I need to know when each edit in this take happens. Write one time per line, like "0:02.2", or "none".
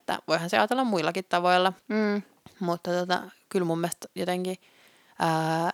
0:01.8